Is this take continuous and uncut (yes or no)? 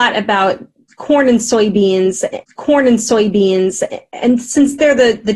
no